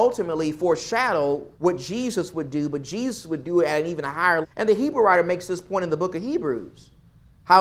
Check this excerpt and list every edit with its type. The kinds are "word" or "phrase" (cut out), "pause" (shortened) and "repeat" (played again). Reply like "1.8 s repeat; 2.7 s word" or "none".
1.5 s pause; 4.4 s word